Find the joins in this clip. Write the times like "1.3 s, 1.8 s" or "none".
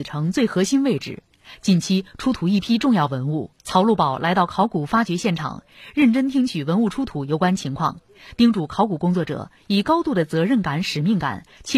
3.6 s